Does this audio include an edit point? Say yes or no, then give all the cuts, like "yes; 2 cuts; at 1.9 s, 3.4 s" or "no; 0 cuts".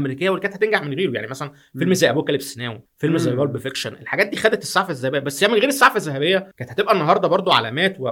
yes; 2 cuts; at 2.9 s, 6.5 s